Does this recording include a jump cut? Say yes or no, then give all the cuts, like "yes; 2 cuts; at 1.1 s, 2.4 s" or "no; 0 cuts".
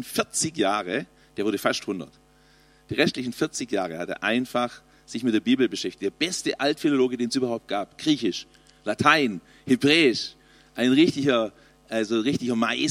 no; 0 cuts